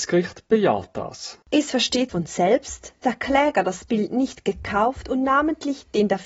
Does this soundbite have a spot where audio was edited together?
yes; 2 cuts; at 2.1 s, 3.0 s

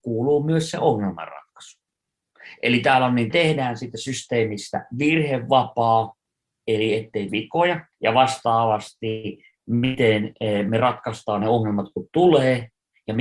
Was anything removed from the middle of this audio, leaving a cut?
yes; 4 cuts; at 3.3 s, 6.3 s, 7.3 s, 7.9 s

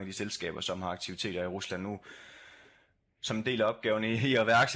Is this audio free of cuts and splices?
yes; 0 cuts

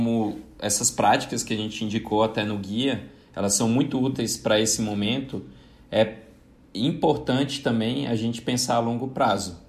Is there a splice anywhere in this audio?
no; 0 cuts

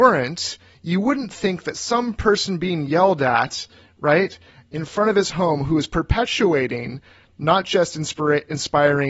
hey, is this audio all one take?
yes; 0 cuts

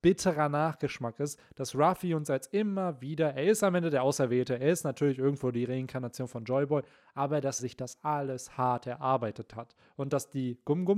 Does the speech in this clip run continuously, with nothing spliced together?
no; 1 cut; at 7.6 s

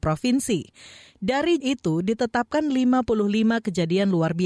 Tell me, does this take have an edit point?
yes; 1 cut; at 1.6 s

